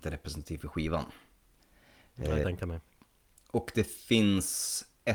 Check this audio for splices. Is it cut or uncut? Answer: cut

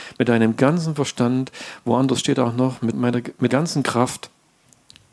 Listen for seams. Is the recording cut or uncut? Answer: cut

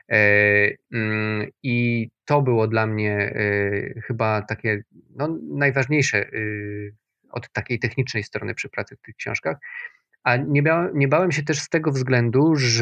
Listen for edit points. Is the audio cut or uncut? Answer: uncut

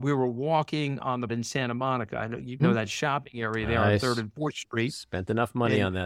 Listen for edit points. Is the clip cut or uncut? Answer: cut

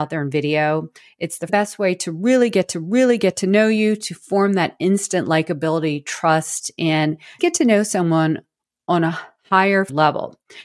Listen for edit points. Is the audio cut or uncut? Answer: cut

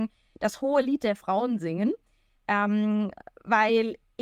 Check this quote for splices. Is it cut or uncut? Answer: uncut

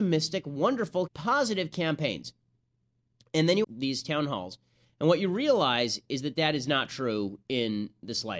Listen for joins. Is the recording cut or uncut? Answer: cut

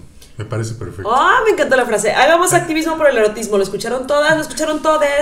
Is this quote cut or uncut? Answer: uncut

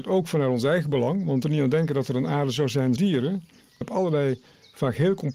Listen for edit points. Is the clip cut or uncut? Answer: cut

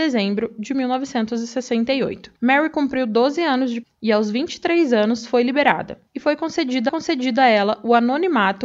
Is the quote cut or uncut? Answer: cut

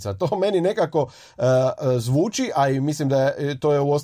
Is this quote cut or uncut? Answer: uncut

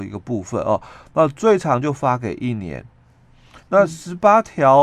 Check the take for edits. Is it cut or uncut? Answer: cut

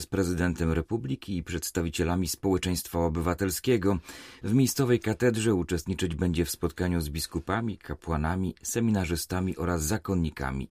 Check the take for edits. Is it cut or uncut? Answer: uncut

